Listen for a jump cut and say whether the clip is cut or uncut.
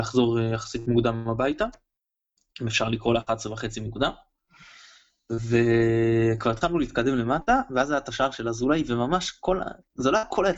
uncut